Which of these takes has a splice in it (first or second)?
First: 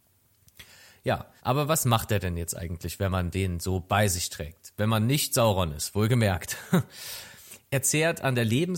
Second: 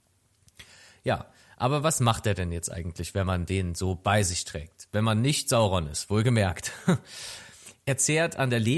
first